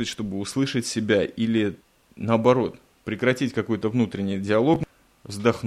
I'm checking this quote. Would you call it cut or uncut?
uncut